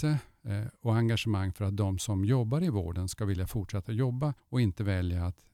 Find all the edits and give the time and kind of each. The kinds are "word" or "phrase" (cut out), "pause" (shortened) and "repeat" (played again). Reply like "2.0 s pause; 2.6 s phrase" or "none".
4.4 s pause

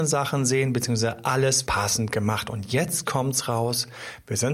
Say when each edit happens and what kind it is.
1.7 s word

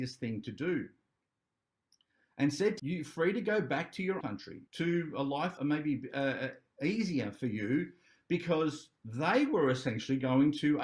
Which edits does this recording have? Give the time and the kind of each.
2.8 s phrase; 4.2 s word; 4.7 s pause; 5.6 s word

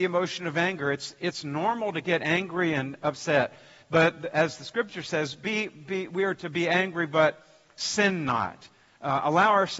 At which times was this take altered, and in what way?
none

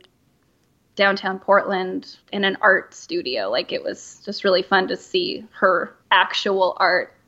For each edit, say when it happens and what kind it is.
2.2 s pause; 6.0 s pause

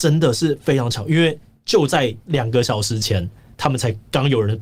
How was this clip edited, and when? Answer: none

